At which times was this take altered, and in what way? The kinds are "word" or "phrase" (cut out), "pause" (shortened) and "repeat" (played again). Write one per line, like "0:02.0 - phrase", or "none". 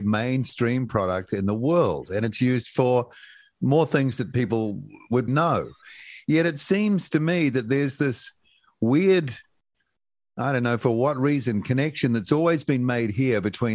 0:05.3 - word